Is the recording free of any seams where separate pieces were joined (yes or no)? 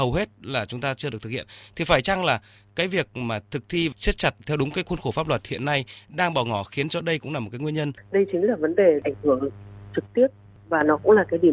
yes